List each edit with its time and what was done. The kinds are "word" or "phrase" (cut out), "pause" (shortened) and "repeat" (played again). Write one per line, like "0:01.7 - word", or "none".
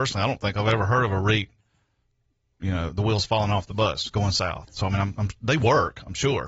none